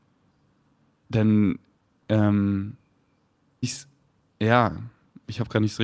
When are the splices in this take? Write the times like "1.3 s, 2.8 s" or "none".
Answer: 3.6 s